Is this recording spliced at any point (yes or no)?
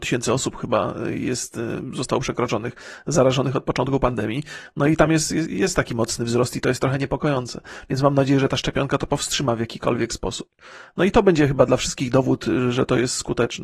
no